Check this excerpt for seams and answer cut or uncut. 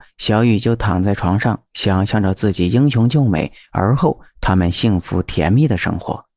uncut